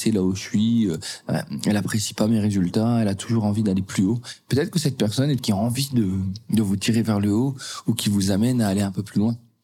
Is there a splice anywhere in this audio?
yes; 1 cut; at 5.4 s

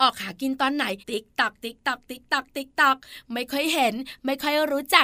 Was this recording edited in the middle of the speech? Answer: yes; 1 cut; at 1.0 s

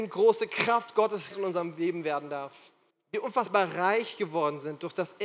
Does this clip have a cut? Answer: yes; 2 cuts; at 1.3 s, 2.9 s

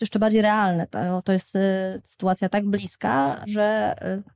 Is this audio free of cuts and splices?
yes; 0 cuts

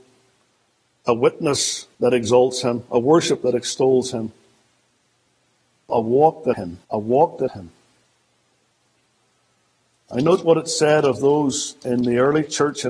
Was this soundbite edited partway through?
yes; 5 cuts; at 1.9 s, 5.9 s, 6.5 s, 6.8 s, 7.5 s

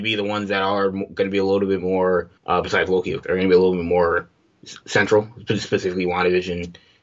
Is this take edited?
yes; 3 cuts; at 2.4 s, 3.2 s, 4.8 s

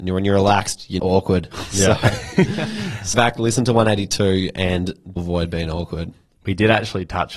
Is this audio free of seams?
no; 3 cuts; at 1.0 s, 3.1 s, 5.2 s

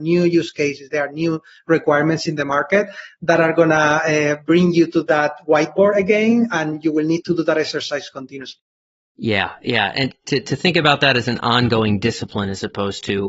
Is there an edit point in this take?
no; 0 cuts

